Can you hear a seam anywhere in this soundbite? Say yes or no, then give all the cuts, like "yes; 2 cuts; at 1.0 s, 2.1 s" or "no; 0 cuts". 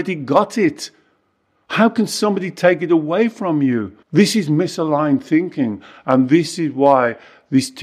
yes; 1 cut; at 4.0 s